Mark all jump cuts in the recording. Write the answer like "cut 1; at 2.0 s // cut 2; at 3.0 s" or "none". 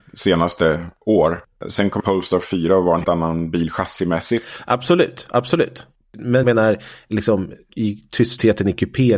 cut 1; at 2.0 s // cut 2; at 3.0 s // cut 3; at 6.4 s // cut 4; at 7.7 s